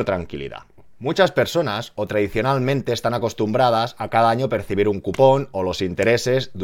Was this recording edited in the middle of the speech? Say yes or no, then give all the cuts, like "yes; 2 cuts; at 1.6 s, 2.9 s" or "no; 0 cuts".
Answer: no; 0 cuts